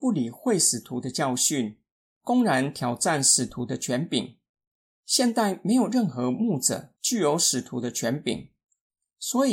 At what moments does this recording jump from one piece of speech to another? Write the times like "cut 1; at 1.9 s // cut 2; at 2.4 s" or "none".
none